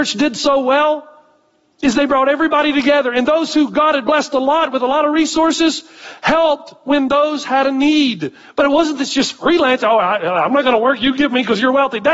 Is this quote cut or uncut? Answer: uncut